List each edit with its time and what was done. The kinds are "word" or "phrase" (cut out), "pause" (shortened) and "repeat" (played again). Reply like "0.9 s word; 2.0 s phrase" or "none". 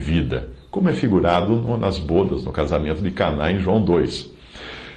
none